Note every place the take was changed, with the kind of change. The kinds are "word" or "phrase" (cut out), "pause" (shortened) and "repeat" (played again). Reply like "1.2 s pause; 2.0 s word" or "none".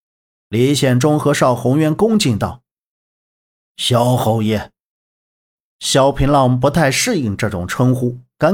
none